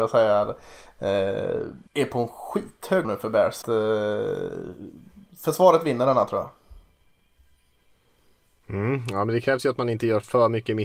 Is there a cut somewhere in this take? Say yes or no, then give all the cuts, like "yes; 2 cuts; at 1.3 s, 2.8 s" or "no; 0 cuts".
yes; 3 cuts; at 1.9 s, 3.0 s, 3.6 s